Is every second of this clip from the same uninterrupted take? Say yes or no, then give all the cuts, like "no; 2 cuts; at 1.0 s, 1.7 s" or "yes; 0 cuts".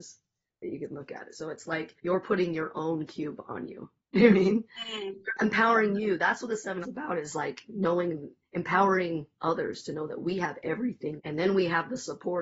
no; 4 cuts; at 2.0 s, 4.3 s, 6.8 s, 11.2 s